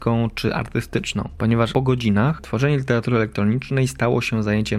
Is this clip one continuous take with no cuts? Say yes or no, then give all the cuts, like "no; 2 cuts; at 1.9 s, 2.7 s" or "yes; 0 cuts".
no; 1 cut; at 1.7 s